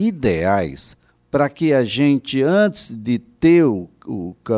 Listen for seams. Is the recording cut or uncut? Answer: cut